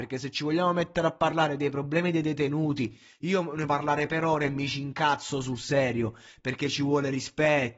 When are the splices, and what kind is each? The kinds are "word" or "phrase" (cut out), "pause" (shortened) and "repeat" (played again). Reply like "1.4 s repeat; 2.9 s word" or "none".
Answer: 3.7 s word